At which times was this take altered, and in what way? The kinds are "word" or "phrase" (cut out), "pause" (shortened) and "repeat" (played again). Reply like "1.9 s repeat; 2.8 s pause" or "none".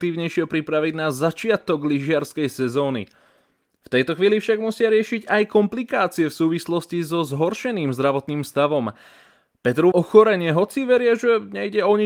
9.9 s phrase